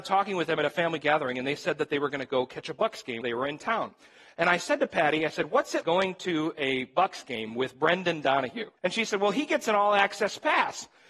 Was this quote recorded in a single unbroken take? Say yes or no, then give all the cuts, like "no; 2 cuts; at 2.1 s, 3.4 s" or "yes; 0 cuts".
no; 3 cuts; at 3.2 s, 5.8 s, 8.8 s